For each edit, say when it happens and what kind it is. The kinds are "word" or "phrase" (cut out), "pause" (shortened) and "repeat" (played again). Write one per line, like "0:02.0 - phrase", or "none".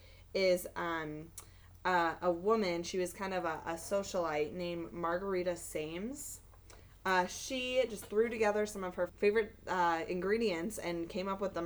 0:09.1 - word